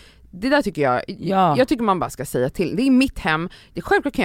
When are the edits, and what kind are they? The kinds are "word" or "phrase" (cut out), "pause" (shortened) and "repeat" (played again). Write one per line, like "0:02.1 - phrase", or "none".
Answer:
none